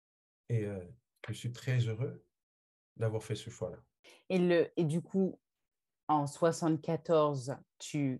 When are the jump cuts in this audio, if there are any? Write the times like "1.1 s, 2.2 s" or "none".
none